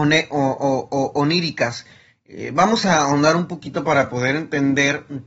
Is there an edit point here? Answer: no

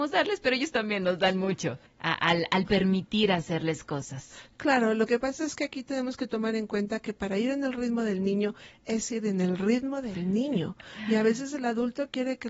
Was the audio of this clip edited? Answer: yes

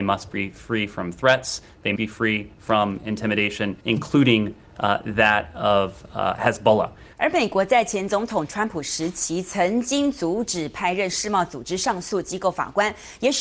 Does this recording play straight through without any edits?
no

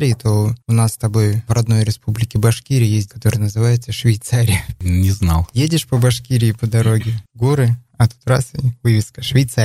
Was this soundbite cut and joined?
yes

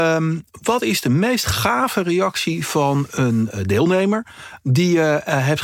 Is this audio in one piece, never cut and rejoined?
yes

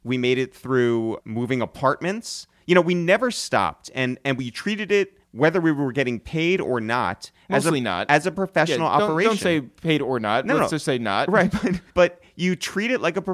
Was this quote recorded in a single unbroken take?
no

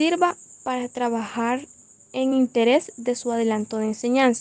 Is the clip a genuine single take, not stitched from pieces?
yes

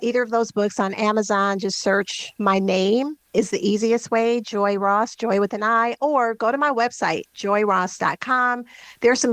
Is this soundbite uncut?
yes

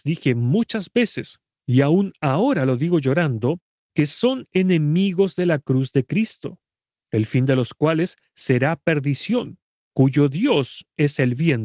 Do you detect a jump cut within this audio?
no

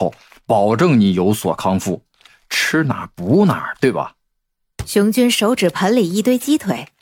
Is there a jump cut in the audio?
no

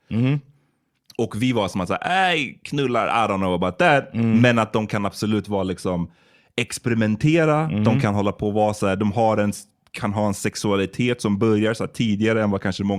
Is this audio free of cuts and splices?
yes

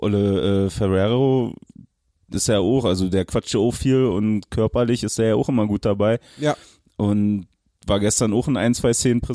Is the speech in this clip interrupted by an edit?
no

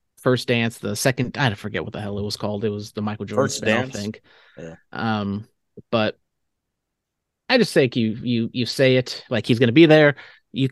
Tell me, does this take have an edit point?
no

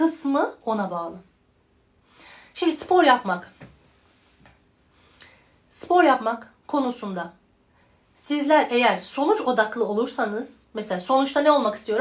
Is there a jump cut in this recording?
no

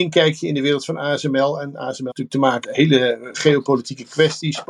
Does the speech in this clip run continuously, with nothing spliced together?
no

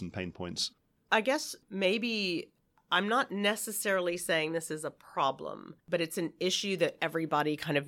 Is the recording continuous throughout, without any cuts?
no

